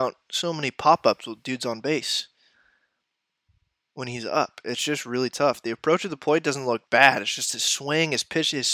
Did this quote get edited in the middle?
yes; 1 cut; at 6.9 s

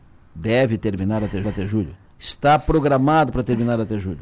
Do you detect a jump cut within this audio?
yes; 1 cut; at 1.4 s

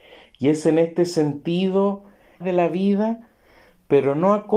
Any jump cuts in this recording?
yes; 1 cut; at 2.4 s

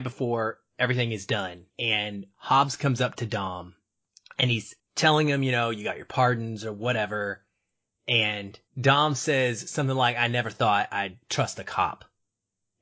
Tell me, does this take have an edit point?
yes; 4 cuts; at 1.7 s, 4.1 s, 4.8 s, 8.7 s

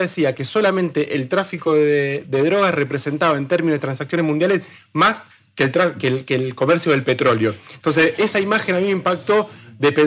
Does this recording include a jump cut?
no; 0 cuts

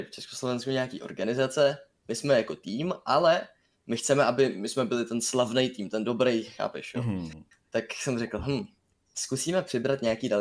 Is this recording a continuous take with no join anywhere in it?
yes; 0 cuts

